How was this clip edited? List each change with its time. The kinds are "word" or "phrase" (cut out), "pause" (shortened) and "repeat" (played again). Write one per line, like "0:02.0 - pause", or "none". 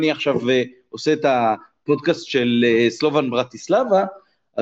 none